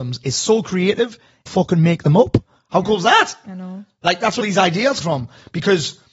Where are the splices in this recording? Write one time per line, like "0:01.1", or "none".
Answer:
0:01.5
0:04.4
0:05.0